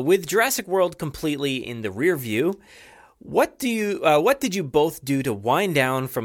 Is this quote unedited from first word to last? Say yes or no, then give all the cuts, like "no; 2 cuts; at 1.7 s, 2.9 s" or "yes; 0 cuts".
yes; 0 cuts